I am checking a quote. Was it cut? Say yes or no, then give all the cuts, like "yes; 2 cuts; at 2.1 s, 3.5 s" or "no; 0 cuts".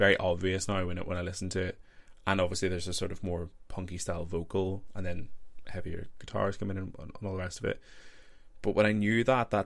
no; 0 cuts